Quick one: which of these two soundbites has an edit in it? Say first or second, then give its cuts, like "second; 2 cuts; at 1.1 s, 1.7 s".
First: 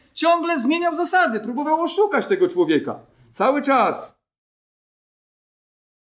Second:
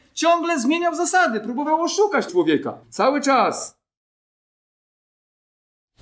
second; 2 cuts; at 2.3 s, 2.8 s